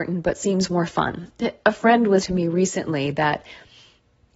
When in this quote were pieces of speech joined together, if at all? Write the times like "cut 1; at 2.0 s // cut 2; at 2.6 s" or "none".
cut 1; at 1.6 s // cut 2; at 2.2 s